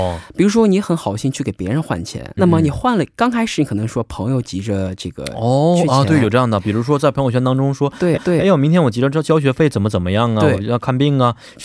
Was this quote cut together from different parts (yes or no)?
yes